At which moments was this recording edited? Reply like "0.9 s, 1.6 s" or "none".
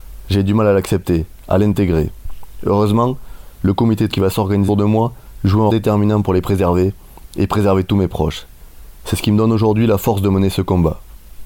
4.1 s, 4.7 s, 5.7 s